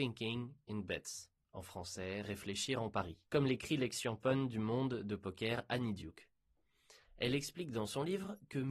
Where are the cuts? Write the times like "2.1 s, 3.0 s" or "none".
3.3 s